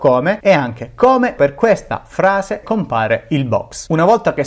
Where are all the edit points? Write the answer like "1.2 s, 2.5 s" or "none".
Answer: 1.4 s, 2.6 s